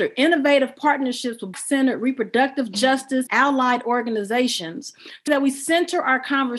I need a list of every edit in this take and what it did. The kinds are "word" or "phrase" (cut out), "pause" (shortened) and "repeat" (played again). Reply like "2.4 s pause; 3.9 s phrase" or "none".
1.5 s word; 3.3 s word; 5.3 s word